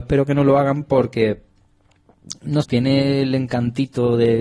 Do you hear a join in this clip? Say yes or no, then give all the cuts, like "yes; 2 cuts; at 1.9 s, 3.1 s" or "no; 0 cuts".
yes; 1 cut; at 2.6 s